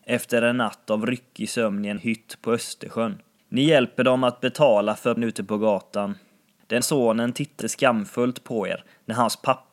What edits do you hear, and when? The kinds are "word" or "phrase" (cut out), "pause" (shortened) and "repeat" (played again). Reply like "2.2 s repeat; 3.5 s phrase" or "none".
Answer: 2.0 s phrase; 5.2 s word; 6.8 s word; 7.6 s word

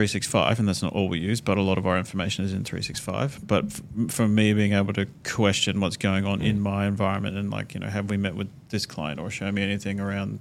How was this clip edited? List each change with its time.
none

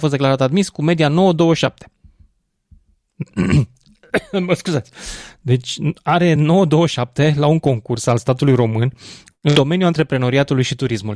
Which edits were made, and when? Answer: none

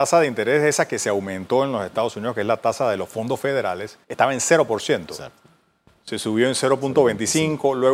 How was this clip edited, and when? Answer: 4.0 s pause

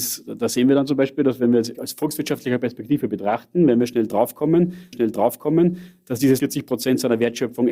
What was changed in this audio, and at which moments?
1.7 s word; 4.9 s repeat; 6.4 s word

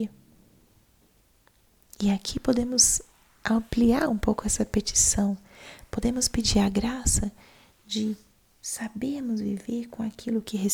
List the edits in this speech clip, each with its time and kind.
none

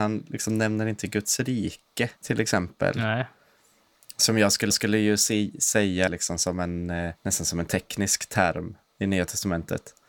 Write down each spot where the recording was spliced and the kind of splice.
2.2 s pause; 4.7 s repeat; 6.1 s word; 7.2 s pause

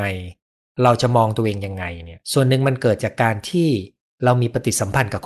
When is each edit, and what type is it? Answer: 2.2 s pause

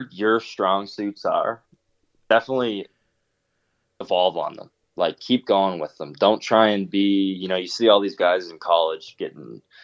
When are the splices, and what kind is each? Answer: 2.1 s word

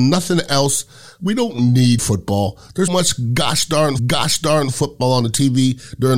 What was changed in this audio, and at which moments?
2.0 s word; 2.9 s word; 4.0 s repeat

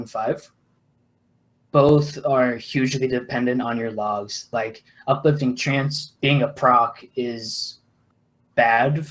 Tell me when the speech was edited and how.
none

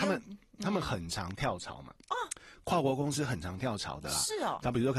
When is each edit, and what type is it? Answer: 2.0 s pause

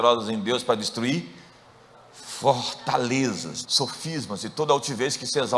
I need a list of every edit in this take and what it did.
3.6 s word

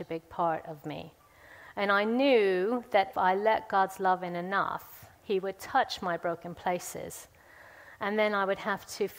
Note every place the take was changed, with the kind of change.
3.1 s word

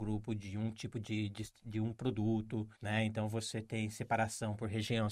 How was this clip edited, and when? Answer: 2.7 s pause

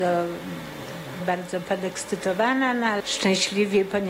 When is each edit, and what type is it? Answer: 1.2 s word; 3.0 s word

